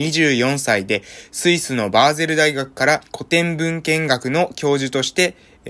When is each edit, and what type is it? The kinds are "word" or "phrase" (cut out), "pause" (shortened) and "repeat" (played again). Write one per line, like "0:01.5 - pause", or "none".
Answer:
0:03.1 - pause